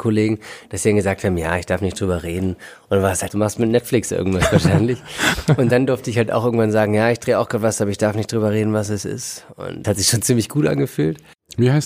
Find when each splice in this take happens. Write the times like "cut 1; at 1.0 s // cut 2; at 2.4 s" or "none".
cut 1; at 3.3 s // cut 2; at 9.8 s